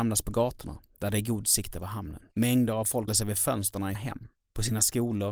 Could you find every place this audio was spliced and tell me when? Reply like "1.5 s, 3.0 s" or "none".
2.3 s, 3.1 s, 3.9 s

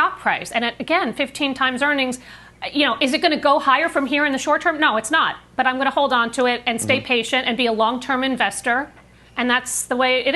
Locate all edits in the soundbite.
none

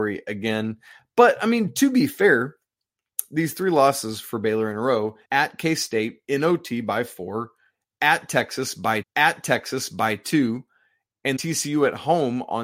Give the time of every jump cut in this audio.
5.2 s, 9.0 s, 11.4 s

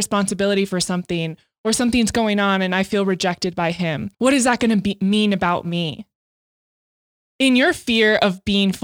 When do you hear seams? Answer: 4.1 s

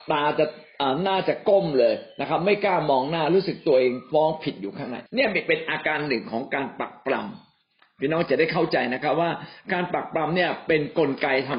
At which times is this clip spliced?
5.1 s

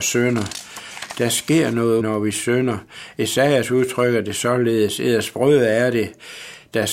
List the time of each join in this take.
2.0 s

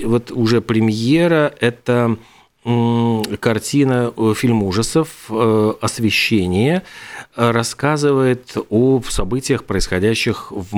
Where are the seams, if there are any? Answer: none

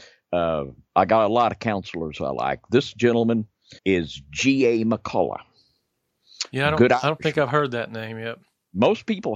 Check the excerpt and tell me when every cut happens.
3.8 s

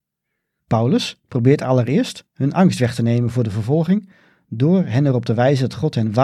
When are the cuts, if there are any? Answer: none

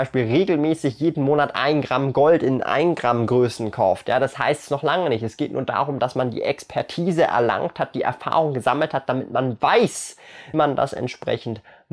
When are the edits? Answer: 10.5 s

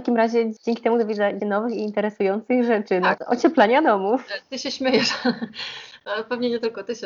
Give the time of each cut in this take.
1.4 s, 3.2 s

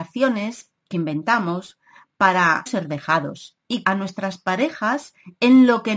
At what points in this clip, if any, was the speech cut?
0.9 s, 2.7 s, 3.8 s

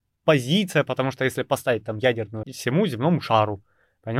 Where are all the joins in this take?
2.4 s

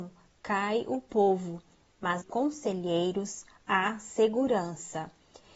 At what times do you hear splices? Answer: 2.2 s

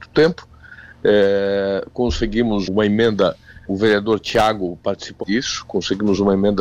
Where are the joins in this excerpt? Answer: 2.6 s, 3.7 s, 5.2 s

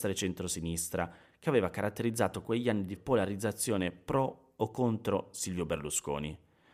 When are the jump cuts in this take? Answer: 3.0 s

